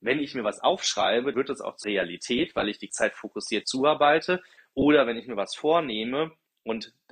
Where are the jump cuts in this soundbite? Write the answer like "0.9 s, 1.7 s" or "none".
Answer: 1.3 s, 1.8 s, 2.9 s, 3.6 s